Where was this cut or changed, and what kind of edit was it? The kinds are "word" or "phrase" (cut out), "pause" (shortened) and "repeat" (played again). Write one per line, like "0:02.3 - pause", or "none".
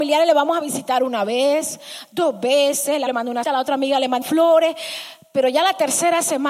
0:03.1 - word
0:03.4 - word
0:04.2 - word